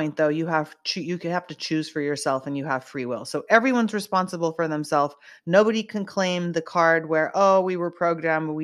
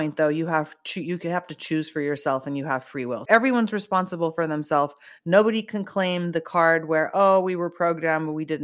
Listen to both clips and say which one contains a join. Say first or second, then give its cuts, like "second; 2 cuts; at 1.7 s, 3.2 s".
second; 1 cut; at 3.3 s